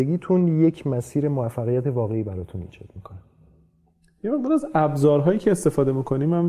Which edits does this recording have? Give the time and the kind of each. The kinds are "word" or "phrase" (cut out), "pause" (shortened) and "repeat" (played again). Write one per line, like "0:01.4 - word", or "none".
none